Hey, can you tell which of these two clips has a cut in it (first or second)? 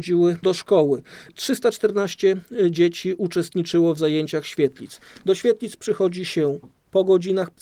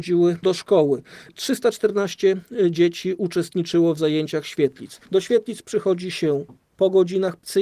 second